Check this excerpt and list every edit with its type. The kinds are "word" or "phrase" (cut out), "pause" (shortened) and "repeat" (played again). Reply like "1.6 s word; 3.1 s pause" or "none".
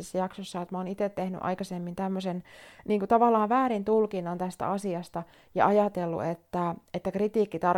none